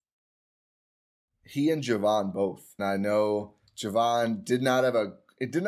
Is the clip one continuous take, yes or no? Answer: no